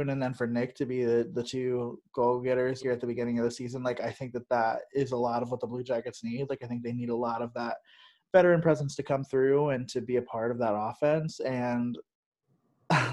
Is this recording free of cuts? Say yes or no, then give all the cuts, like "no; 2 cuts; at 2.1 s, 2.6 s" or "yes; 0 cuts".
no; 1 cut; at 2.8 s